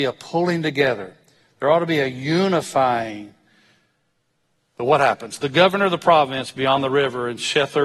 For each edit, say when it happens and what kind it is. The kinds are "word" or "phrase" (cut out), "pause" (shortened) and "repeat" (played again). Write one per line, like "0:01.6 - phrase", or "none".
none